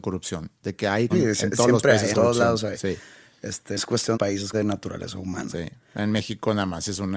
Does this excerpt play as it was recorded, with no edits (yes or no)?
no